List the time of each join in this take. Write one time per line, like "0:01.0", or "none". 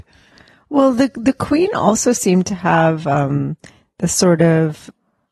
none

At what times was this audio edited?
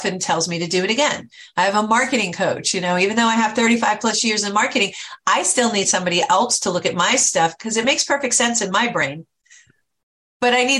none

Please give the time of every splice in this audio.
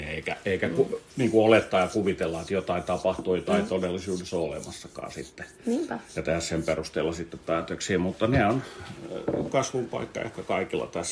0:06.1

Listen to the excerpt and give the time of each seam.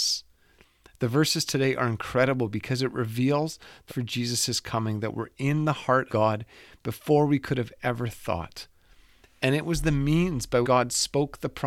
0:03.9
0:06.1
0:10.6

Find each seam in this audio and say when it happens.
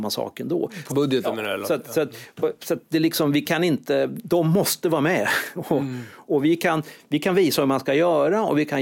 0:00.9

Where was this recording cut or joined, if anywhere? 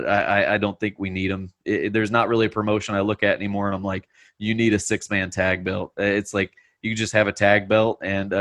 none

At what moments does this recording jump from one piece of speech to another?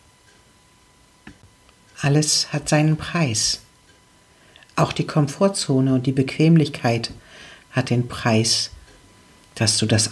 none

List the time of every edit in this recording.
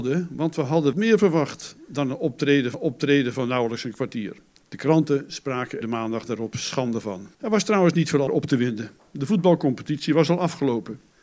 0:00.9
0:02.7
0:04.6
0:05.8
0:07.3
0:08.3

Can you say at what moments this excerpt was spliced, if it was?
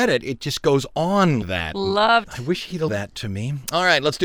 0:01.4
0:02.2
0:02.9

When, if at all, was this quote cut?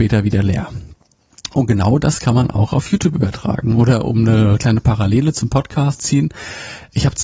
0:06.0

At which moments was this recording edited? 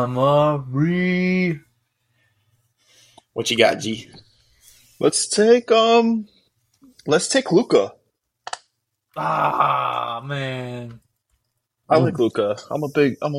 none

